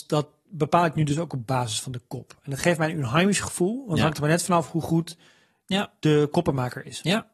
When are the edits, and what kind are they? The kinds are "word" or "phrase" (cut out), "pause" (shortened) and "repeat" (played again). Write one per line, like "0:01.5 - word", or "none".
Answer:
none